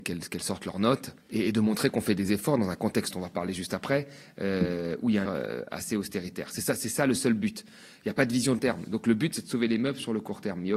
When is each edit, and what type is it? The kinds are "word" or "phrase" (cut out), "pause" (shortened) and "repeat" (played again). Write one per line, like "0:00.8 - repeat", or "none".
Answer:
0:01.2 - pause
0:03.1 - phrase
0:05.3 - phrase
0:08.6 - word